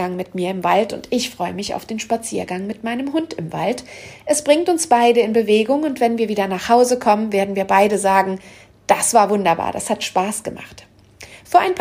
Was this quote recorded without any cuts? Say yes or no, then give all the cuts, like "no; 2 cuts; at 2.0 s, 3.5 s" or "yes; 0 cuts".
yes; 0 cuts